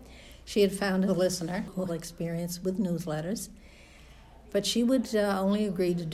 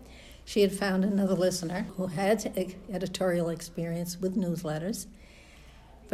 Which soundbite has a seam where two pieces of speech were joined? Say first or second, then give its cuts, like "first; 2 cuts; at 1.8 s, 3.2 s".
first; 2 cuts; at 1.1 s, 1.9 s